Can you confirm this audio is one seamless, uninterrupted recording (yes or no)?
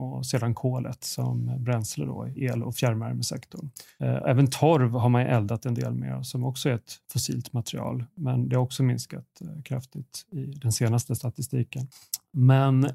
no